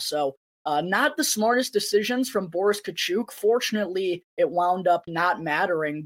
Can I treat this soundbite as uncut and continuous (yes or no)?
no